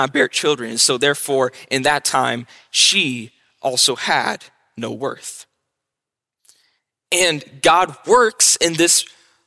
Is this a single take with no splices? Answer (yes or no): yes